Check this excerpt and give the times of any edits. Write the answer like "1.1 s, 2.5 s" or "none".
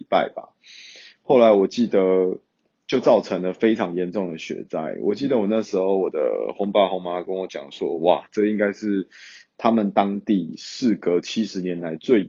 none